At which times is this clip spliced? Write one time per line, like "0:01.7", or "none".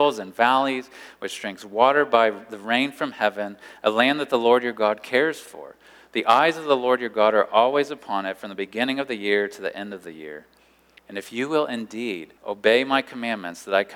0:12.4